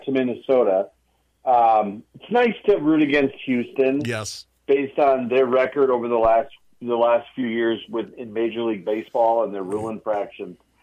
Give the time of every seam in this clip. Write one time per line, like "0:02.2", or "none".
none

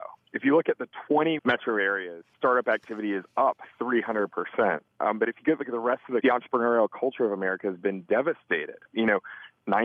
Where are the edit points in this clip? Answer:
0:01.4
0:02.3
0:06.2

